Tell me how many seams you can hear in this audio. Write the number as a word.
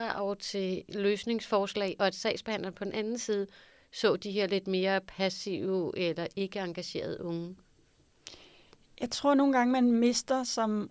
zero